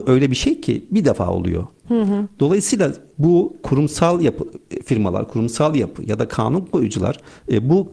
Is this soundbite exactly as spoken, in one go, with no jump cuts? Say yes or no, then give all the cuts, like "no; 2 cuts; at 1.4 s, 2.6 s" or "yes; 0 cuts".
yes; 0 cuts